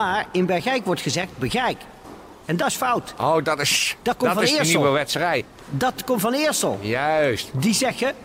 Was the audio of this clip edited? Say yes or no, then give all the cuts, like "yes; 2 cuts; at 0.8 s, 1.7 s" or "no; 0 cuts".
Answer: no; 0 cuts